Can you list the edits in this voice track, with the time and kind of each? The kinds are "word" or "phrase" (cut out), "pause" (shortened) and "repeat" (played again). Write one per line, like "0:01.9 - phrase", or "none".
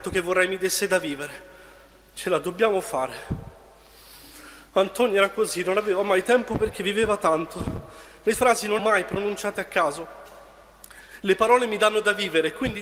0:08.3 - word
0:08.8 - word